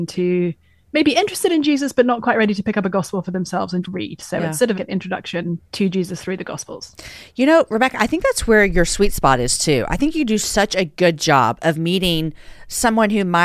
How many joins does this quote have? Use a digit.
2